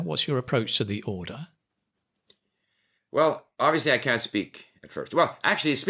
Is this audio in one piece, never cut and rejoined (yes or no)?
yes